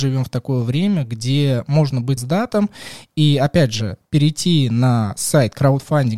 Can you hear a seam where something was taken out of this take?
yes; 1 cut; at 2.2 s

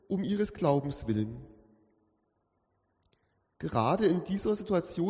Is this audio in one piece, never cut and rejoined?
yes; 0 cuts

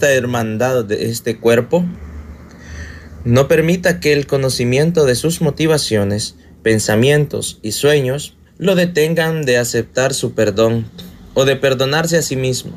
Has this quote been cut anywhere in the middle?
yes; 1 cut; at 8.5 s

